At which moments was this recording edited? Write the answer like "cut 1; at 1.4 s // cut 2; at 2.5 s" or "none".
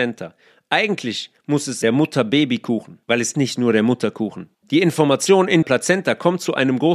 cut 1; at 1.4 s // cut 2; at 1.8 s // cut 3; at 3.0 s // cut 4; at 3.3 s // cut 5; at 4.5 s // cut 6; at 5.6 s